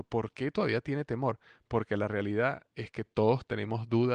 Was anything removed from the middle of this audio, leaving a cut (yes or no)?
no